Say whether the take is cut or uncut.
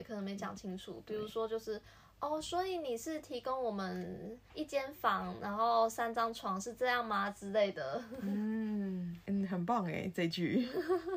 uncut